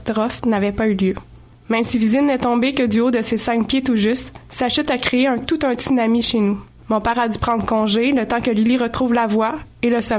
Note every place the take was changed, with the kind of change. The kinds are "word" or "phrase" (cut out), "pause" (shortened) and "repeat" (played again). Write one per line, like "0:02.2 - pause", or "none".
none